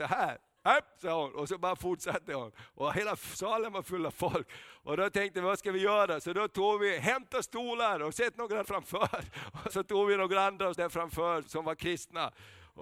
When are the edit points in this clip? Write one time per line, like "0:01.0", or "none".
0:08.6
0:09.7
0:10.7
0:11.4

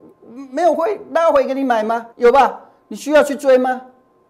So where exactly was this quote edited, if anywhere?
0:02.1

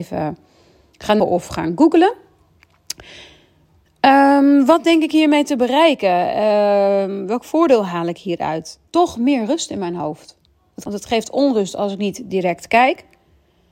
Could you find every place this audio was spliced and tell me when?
0:01.2
0:08.9
0:10.9

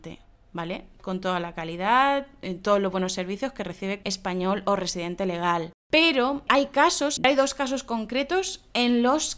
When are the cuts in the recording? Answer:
0:04.0
0:05.8
0:07.2

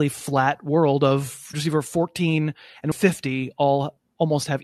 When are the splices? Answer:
0:01.5
0:02.9

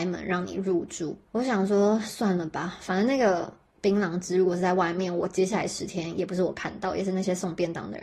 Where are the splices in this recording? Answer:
0:01.3

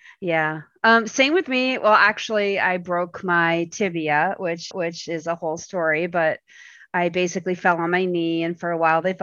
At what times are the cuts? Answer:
0:04.7

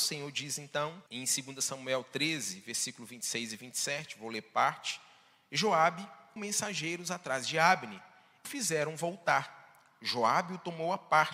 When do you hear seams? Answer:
0:01.1
0:06.4
0:08.4

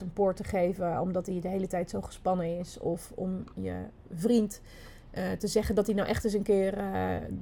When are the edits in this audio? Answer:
none

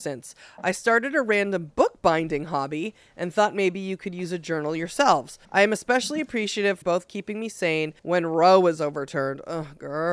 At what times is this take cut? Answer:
0:05.4
0:06.8
0:08.0

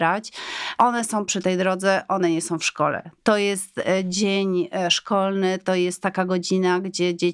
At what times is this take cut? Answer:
none

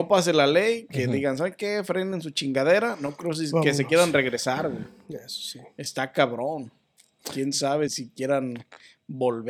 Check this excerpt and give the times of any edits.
0:07.9

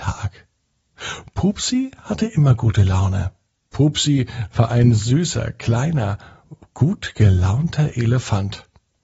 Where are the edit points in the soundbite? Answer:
none

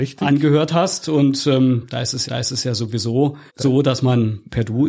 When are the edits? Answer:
0:02.3
0:03.5

